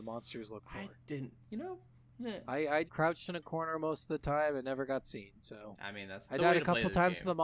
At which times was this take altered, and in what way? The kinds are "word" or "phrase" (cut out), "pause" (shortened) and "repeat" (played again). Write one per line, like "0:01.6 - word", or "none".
0:01.4 - pause
0:01.9 - pause
0:02.9 - word